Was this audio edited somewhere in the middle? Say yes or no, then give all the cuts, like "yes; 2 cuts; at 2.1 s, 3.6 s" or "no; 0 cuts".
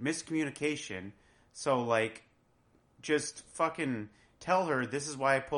no; 0 cuts